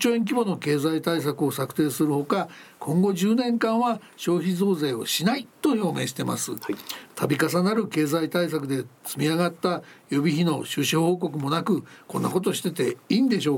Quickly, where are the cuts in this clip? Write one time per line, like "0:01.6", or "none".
0:05.5